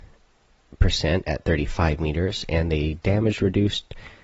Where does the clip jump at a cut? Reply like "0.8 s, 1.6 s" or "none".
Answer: none